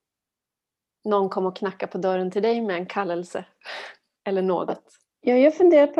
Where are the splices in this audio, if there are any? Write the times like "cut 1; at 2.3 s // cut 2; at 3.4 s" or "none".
none